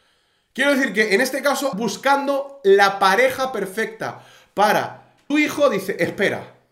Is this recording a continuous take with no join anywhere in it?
no; 2 cuts; at 1.7 s, 5.3 s

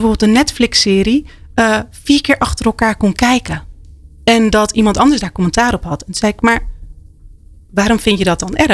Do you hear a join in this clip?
no; 0 cuts

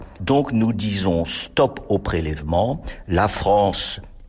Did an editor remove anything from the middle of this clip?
no; 0 cuts

